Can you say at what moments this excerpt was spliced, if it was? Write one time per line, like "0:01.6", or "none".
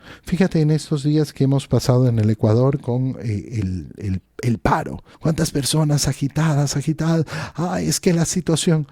0:05.1